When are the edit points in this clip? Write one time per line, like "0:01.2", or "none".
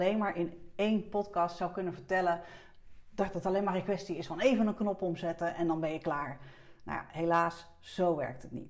none